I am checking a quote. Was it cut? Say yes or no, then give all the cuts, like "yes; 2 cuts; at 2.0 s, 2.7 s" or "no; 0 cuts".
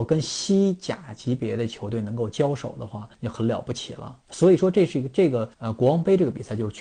yes; 3 cuts; at 3.1 s, 4.2 s, 5.5 s